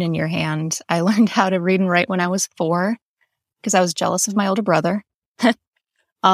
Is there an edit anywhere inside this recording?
no; 0 cuts

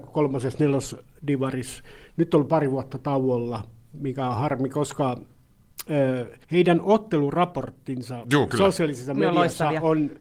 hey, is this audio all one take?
no; 1 cut; at 6.4 s

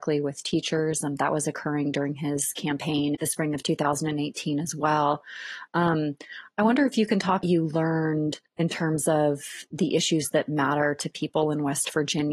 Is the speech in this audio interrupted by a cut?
yes; 3 cuts; at 3.1 s, 7.4 s, 8.5 s

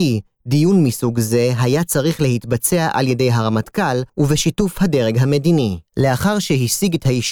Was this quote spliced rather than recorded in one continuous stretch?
yes; 2 cuts; at 4.1 s, 5.9 s

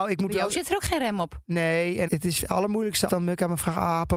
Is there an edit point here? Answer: yes; 3 cuts; at 2.1 s, 2.4 s, 3.1 s

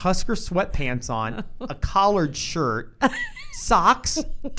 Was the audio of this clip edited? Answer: no; 0 cuts

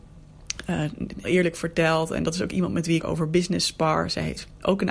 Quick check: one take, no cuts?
no; 2 cuts; at 1.2 s, 3.0 s

